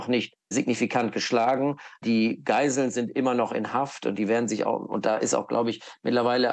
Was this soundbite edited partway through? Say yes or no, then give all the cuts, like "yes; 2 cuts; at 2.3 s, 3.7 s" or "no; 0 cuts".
no; 0 cuts